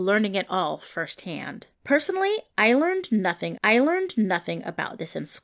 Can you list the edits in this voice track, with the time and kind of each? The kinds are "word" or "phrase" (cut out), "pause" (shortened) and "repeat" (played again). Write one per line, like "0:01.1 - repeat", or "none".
0:01.7 - pause
0:03.6 - repeat

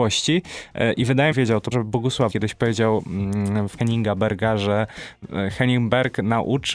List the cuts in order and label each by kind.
0:01.3 - phrase
0:01.7 - word
0:02.3 - word
0:03.8 - word

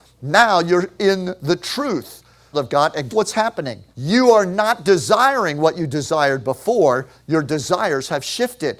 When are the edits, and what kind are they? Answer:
0:02.5 - phrase
0:03.1 - word
0:03.9 - pause

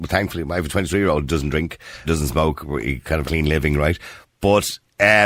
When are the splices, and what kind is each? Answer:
0:02.0 - word
0:03.2 - word

